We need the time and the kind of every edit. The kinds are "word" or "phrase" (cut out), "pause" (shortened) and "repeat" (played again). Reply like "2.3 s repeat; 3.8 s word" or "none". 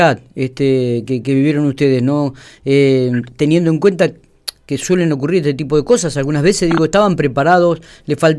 none